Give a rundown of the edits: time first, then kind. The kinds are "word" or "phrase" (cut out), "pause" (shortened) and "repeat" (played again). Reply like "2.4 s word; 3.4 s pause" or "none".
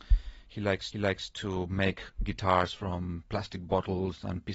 0.9 s repeat